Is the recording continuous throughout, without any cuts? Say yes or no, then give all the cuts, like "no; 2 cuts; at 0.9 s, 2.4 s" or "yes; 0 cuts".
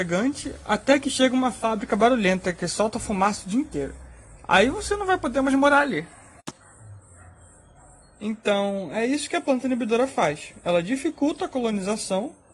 yes; 0 cuts